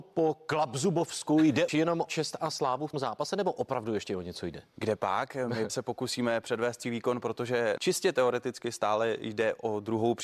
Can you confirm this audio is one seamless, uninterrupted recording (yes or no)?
no